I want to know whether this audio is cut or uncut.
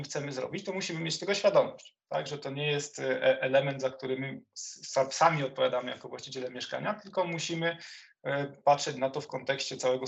cut